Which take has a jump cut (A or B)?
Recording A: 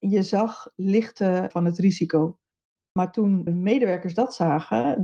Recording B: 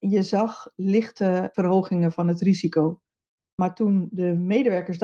A